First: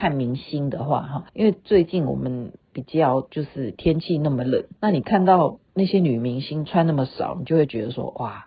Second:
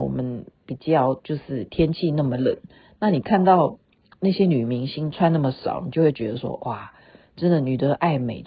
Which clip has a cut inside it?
first; 3 cuts; at 1.3 s, 4.8 s, 5.7 s

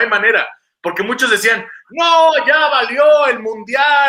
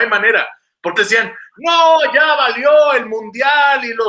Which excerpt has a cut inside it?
second; 1 cut; at 1.0 s

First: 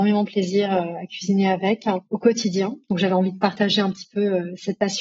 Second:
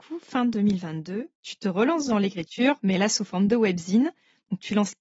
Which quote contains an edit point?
first; 1 cut; at 2.0 s

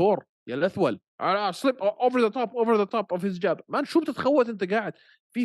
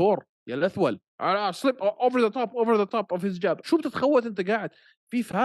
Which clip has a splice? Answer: second; 1 cut; at 3.6 s

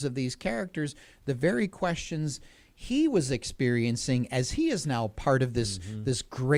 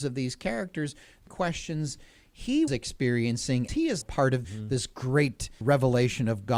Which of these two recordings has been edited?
second; 6 cuts; at 1.3 s, 2.7 s, 3.7 s, 4.0 s, 4.4 s, 5.6 s

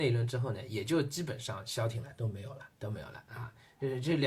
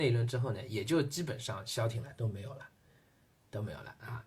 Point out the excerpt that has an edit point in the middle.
first; 1 cut; at 2.7 s

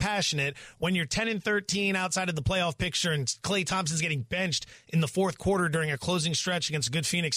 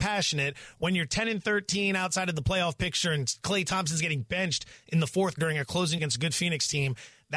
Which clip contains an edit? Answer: second; 2 cuts; at 5.4 s, 6.0 s

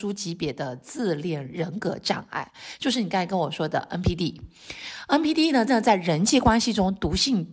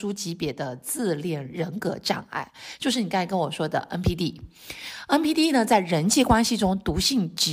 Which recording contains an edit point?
first; 1 cut; at 5.7 s

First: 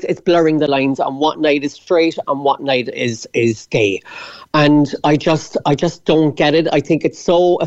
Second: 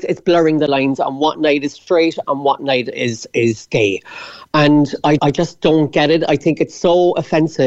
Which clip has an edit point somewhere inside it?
second; 1 cut; at 5.2 s

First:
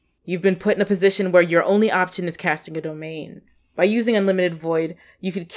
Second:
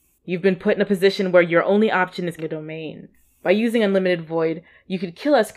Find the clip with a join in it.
second; 1 cut; at 2.4 s

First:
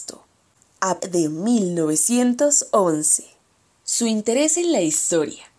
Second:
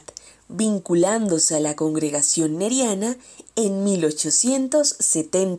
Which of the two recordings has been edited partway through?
first; 2 cuts; at 1.0 s, 3.4 s

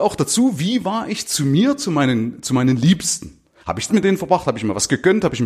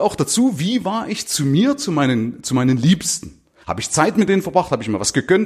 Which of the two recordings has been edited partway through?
first; 1 cut; at 3.9 s

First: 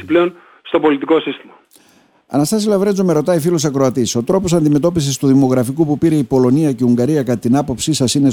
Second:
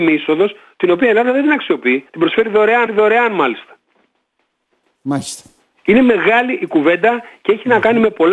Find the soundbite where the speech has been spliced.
second; 2 cuts; at 2.1 s, 2.9 s

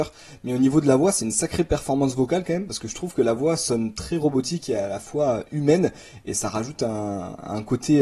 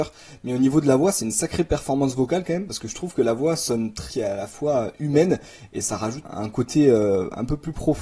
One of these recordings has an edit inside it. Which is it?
second; 2 cuts; at 4.1 s, 6.2 s

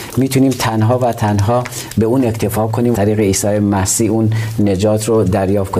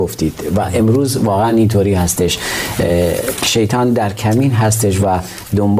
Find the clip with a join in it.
first; 1 cut; at 2.9 s

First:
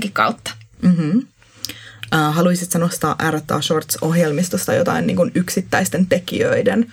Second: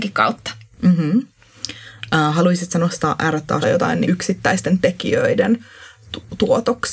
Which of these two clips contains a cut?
second; 2 cuts; at 3.6 s, 4.0 s

